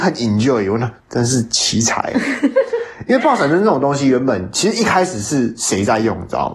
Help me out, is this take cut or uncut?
cut